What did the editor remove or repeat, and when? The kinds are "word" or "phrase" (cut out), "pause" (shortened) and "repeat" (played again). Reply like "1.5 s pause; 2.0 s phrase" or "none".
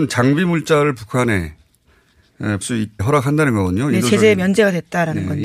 2.6 s word; 3.0 s word